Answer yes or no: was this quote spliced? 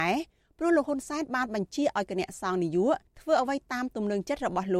yes